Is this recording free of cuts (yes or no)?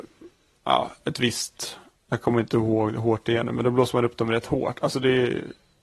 yes